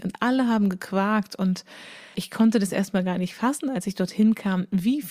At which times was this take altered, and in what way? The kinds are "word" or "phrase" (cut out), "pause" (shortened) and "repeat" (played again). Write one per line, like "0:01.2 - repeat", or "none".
0:02.1 - word